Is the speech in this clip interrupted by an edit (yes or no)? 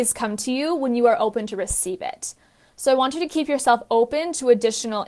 no